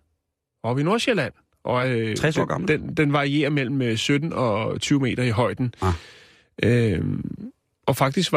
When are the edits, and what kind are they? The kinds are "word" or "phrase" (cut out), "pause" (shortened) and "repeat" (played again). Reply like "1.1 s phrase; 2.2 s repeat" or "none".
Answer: 1.8 s word